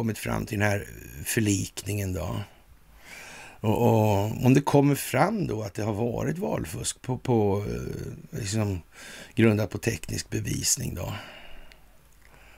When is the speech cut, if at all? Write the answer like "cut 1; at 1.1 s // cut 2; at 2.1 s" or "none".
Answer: none